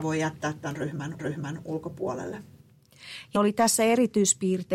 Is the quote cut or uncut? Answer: cut